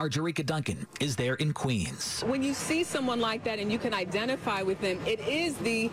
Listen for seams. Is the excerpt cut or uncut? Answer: uncut